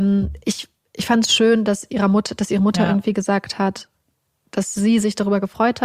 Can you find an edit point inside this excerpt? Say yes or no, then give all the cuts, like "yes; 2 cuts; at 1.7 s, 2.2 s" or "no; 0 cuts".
no; 0 cuts